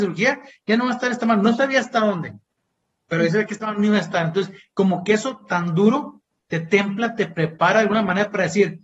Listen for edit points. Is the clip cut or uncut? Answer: uncut